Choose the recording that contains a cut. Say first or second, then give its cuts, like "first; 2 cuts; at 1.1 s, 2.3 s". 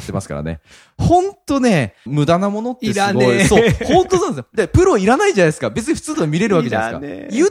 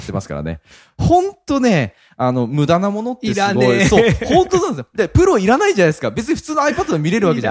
first; 2 cuts; at 2.1 s, 6.1 s